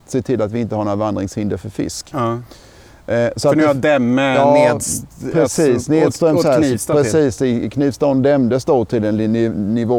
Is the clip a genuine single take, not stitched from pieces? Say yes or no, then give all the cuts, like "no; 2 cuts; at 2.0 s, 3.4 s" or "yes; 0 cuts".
yes; 0 cuts